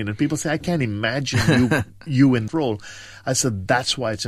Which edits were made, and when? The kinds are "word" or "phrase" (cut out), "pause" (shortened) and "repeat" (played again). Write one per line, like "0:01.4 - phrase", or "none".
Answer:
0:02.0 - pause
0:02.5 - word